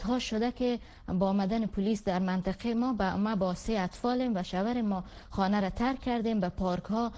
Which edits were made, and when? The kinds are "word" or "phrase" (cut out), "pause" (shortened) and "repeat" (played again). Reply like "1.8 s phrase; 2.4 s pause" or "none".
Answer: none